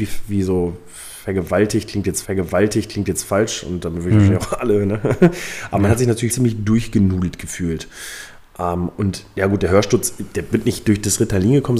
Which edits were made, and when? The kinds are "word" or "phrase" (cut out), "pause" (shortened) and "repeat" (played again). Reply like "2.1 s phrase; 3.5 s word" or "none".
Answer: 2.2 s repeat; 6.3 s word